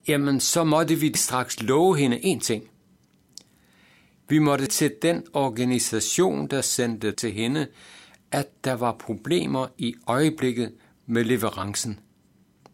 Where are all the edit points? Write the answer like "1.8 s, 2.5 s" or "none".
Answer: 1.2 s, 4.7 s, 7.1 s